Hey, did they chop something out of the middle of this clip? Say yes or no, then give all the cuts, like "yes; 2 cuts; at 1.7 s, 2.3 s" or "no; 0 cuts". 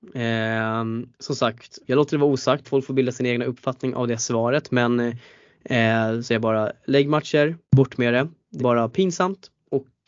yes; 6 cuts; at 1.1 s, 1.8 s, 2.6 s, 6.2 s, 7.6 s, 8.6 s